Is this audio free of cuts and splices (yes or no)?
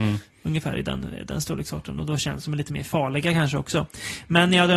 yes